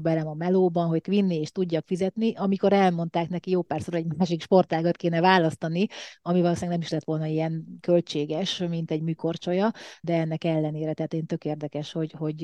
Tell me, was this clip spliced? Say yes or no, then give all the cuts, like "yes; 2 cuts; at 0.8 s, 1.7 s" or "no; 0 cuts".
yes; 2 cuts; at 1.0 s, 10.0 s